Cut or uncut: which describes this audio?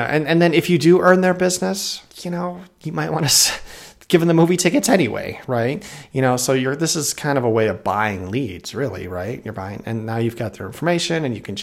cut